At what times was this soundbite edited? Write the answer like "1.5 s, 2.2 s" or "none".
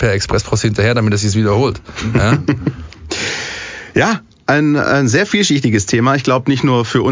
none